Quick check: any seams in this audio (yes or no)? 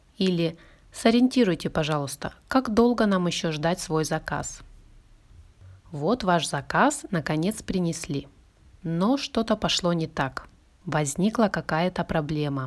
no